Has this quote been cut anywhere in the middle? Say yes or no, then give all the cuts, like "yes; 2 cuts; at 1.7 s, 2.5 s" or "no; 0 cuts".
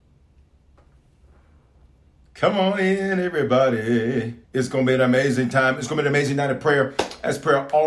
yes; 1 cut; at 4.4 s